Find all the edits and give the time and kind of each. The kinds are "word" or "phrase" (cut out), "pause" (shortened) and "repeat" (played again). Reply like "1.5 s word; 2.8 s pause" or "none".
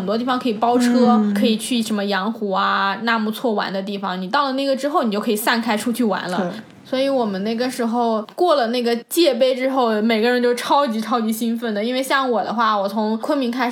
none